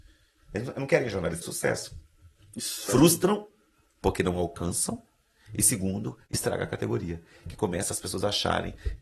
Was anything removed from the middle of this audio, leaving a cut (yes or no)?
yes